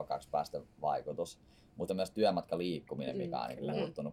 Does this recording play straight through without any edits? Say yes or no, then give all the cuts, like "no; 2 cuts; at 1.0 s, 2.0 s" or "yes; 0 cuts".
no; 1 cut; at 1.9 s